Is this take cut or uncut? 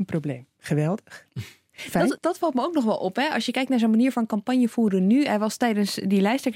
cut